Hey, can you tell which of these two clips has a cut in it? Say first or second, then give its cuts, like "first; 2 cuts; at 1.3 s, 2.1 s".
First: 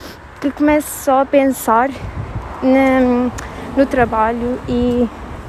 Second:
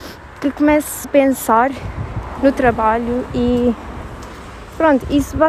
second; 2 cuts; at 1.0 s, 2.4 s